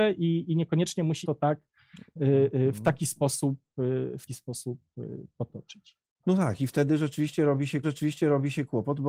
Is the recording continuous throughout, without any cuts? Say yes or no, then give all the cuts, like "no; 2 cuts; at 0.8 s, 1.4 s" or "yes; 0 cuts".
no; 3 cuts; at 1.2 s, 4.3 s, 7.8 s